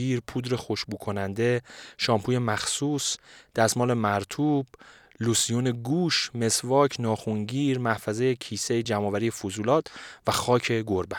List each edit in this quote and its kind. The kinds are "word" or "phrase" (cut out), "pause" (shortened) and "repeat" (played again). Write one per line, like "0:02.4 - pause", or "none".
none